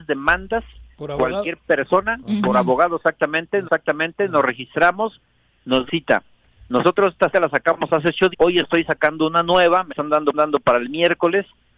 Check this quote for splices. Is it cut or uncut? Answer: cut